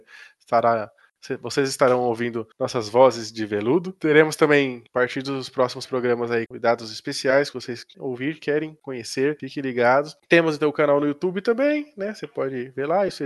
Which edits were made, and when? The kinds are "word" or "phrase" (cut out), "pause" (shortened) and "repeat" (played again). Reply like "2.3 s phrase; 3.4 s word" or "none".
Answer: 2.5 s pause; 4.9 s pause; 6.5 s word; 7.5 s word; 7.9 s word